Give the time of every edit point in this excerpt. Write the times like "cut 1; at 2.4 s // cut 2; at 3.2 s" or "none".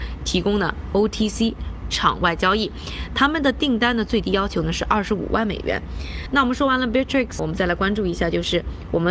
cut 1; at 7.4 s